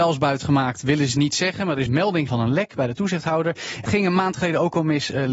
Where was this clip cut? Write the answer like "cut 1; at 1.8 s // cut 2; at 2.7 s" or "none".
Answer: cut 1; at 1.9 s // cut 2; at 2.3 s // cut 3; at 3.9 s

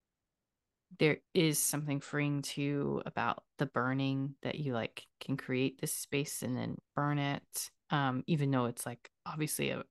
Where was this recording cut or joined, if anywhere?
cut 1; at 1.3 s // cut 2; at 3.5 s // cut 3; at 4.4 s // cut 4; at 6.9 s

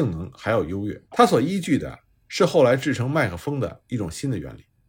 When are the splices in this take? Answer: cut 1; at 1.0 s

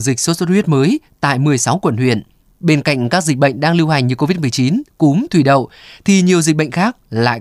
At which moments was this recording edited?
none

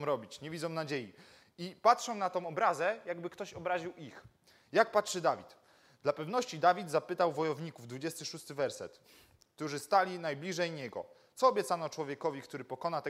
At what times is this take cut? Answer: none

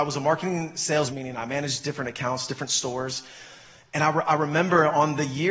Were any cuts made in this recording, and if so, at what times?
cut 1; at 1.1 s

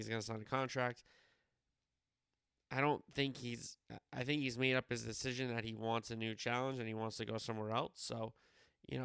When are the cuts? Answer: none

